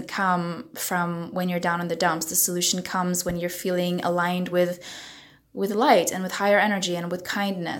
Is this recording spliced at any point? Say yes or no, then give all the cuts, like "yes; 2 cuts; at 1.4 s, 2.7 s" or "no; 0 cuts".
no; 0 cuts